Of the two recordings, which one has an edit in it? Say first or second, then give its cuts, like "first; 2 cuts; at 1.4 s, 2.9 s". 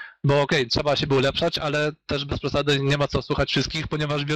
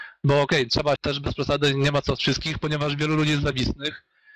second; 2 cuts; at 1.0 s, 2.2 s